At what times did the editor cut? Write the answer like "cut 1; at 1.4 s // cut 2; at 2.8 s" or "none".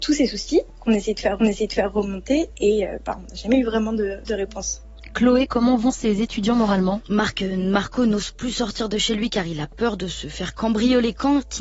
cut 1; at 1.4 s